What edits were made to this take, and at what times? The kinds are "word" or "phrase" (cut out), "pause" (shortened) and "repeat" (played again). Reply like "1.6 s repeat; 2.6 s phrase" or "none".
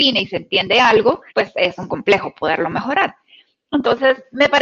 1.3 s pause; 1.9 s word